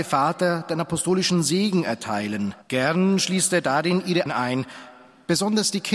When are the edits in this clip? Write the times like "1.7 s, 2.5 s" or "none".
2.6 s, 4.3 s